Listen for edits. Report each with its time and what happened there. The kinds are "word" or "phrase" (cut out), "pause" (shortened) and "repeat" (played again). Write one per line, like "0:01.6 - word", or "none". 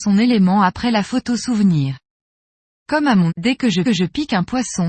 0:03.3 - word
0:03.8 - repeat

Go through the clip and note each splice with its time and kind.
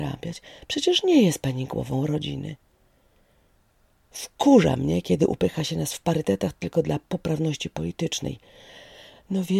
none

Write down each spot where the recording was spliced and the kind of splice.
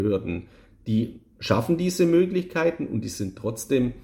0:01.3 - pause

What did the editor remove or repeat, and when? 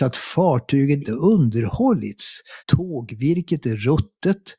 0:01.0 - word
0:02.6 - pause

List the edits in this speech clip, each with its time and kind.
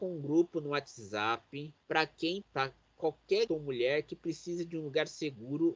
0:01.8 - pause
0:02.4 - word
0:03.5 - word

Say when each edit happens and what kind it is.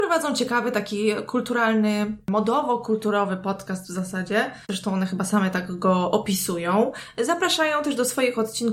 0:04.6 - pause

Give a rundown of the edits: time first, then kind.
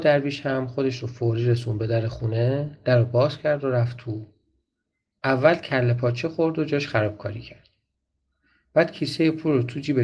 none

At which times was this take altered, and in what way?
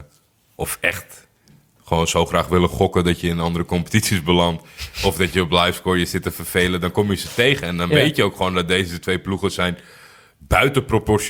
none

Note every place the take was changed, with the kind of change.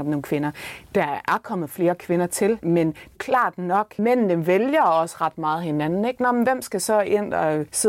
0:03.1 - phrase

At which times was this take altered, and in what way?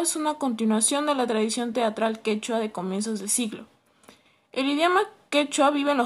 none

